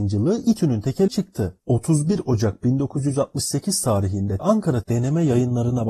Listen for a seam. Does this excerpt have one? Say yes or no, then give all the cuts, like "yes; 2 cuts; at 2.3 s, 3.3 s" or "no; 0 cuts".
yes; 4 cuts; at 1.1 s, 1.6 s, 4.4 s, 4.8 s